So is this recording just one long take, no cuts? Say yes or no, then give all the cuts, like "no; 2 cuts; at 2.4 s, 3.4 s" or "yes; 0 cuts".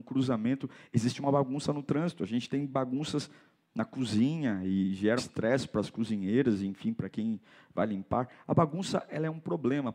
no; 1 cut; at 5.2 s